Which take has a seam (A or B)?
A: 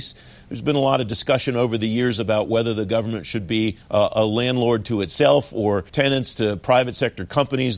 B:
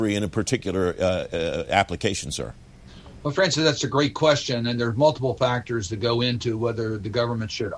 A